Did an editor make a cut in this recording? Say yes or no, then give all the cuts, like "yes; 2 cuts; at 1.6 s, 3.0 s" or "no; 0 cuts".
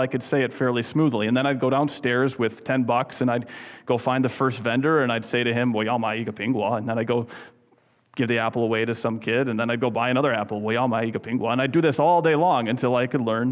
no; 0 cuts